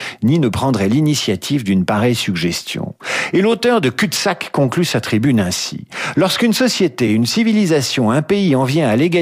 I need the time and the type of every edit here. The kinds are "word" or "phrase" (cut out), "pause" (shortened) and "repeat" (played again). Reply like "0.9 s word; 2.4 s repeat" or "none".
none